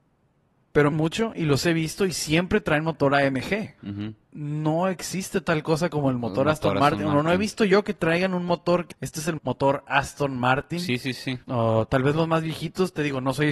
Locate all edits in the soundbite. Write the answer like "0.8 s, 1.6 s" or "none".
0.9 s, 3.8 s, 4.2 s, 8.9 s, 9.4 s, 11.4 s